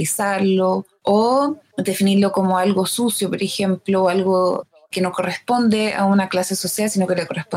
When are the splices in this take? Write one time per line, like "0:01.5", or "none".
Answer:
none